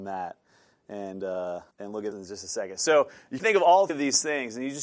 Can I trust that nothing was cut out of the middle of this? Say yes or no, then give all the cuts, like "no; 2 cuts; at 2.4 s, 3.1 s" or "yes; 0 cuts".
no; 4 cuts; at 1.7 s, 2.1 s, 3.4 s, 3.9 s